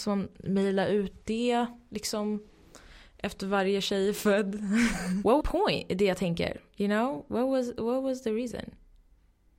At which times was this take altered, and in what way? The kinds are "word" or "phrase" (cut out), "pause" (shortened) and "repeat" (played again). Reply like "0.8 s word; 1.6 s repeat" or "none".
5.4 s phrase